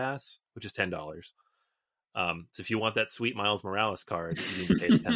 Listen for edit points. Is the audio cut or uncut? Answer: uncut